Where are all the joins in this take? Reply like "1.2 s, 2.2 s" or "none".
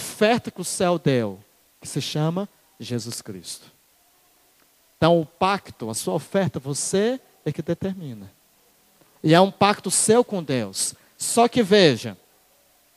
none